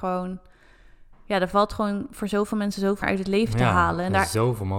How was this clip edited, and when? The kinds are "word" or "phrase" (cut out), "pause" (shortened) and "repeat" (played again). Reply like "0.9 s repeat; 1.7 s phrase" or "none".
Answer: 3.0 s word